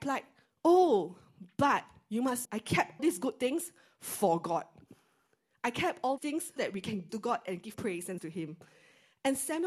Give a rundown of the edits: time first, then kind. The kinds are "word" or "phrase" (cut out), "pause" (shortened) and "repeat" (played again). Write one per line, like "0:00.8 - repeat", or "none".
0:02.4 - word
0:03.0 - word
0:06.2 - word
0:06.6 - word
0:07.1 - word
0:07.7 - word
0:08.2 - word